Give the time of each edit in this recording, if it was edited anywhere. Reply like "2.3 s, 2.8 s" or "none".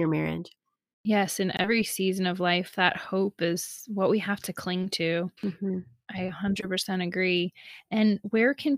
5.4 s